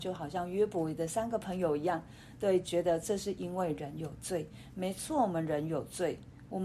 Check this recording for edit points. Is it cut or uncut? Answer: uncut